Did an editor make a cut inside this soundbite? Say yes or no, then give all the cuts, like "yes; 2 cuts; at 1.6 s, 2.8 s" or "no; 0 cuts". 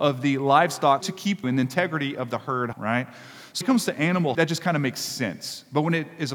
yes; 5 cuts; at 1.0 s, 1.4 s, 2.7 s, 3.6 s, 4.3 s